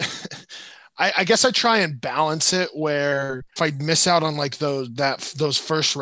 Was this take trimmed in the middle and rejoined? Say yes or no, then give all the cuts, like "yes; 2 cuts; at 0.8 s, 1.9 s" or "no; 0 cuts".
yes; 1 cut; at 3.6 s